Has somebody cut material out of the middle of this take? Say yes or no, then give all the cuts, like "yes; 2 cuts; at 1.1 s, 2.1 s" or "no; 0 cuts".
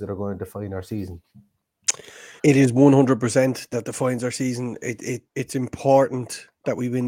yes; 3 cuts; at 2.4 s, 3.7 s, 5.3 s